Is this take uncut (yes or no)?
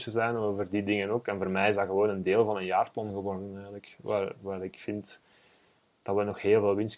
yes